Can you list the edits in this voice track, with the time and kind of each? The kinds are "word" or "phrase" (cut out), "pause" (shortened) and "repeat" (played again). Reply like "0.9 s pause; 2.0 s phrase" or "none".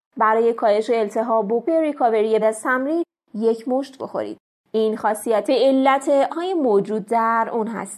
1.6 s word; 2.4 s word; 4.0 s word; 5.5 s word; 6.3 s word

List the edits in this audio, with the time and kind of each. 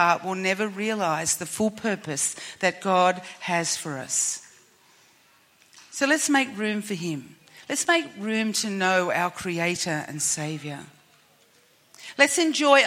none

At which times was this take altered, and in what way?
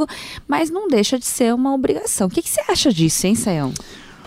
none

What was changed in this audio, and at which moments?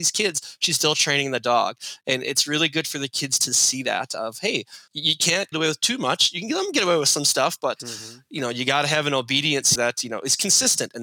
4.9 s pause; 5.5 s phrase; 9.7 s word

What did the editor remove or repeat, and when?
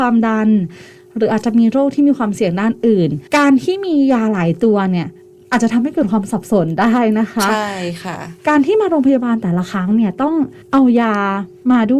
3.3 s pause; 8.4 s pause; 10.6 s pause

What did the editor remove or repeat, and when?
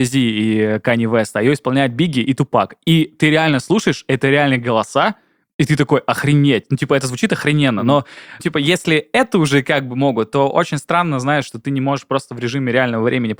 8.4 s word

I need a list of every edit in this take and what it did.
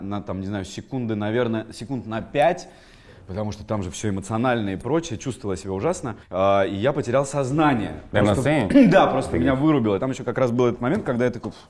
6.2 s pause

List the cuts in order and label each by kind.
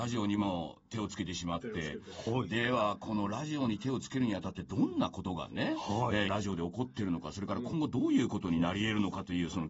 6.3 s word

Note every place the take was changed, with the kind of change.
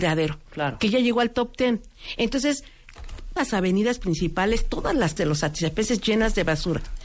3.4 s word; 5.2 s word

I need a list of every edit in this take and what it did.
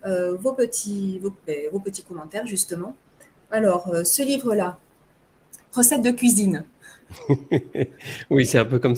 5.6 s pause

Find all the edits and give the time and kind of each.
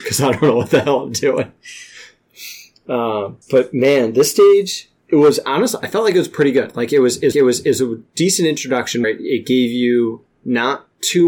3.4 s pause; 5.0 s pause; 7.3 s repeat; 9.0 s word

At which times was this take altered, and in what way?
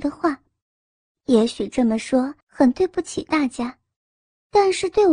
2.4 s pause

